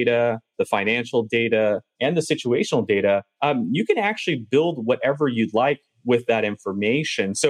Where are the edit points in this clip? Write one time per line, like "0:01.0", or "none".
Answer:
none